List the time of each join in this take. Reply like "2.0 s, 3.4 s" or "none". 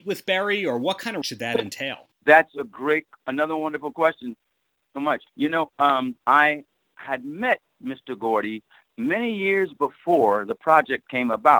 1.2 s, 5.3 s, 6.2 s